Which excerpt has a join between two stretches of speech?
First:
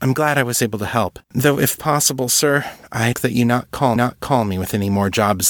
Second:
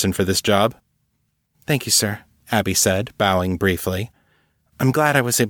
first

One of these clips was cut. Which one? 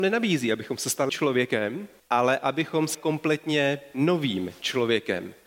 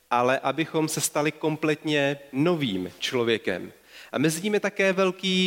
first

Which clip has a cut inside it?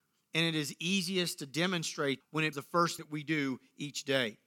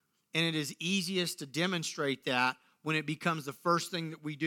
first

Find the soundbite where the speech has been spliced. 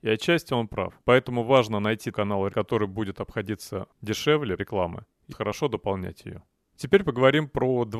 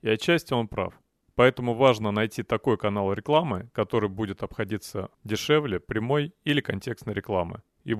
first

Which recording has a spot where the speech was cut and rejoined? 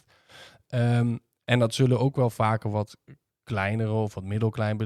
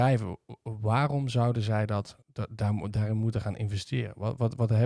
second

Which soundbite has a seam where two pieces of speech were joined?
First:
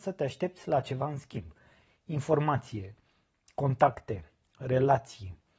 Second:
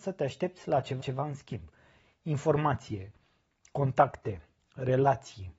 second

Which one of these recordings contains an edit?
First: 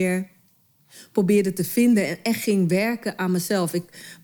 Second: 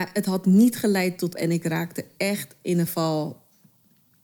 second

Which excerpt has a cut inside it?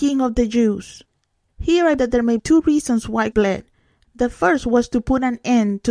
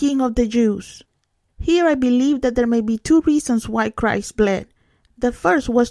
first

